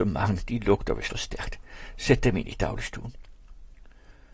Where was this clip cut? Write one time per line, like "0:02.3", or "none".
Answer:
0:01.1